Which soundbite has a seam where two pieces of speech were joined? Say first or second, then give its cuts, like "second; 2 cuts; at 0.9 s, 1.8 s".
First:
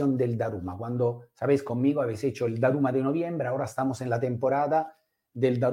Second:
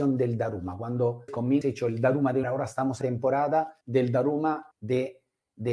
second; 6 cuts; at 1.3 s, 1.6 s, 2.4 s, 3.0 s, 3.8 s, 4.7 s